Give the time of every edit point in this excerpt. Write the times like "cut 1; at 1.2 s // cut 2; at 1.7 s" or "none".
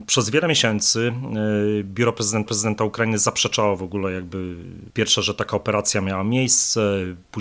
cut 1; at 2.5 s